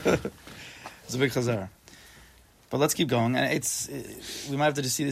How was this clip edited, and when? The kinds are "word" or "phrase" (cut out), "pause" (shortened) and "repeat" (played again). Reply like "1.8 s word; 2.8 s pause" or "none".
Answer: none